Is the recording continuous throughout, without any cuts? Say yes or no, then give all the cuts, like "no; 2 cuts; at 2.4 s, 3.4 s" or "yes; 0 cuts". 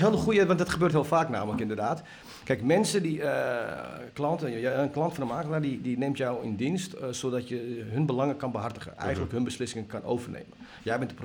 yes; 0 cuts